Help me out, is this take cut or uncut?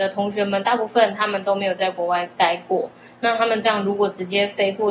uncut